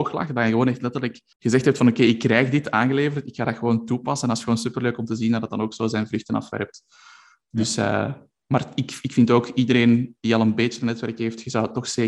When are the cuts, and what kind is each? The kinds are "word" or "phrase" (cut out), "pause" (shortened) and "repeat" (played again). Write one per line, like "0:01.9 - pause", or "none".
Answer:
0:01.3 - pause